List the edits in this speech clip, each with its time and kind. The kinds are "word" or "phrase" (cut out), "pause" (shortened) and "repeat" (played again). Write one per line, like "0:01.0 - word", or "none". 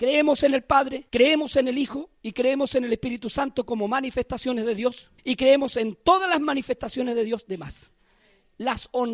0:01.1 - pause
0:05.2 - pause